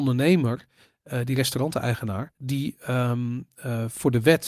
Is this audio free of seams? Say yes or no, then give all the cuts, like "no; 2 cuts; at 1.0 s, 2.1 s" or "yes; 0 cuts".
no; 1 cut; at 2.3 s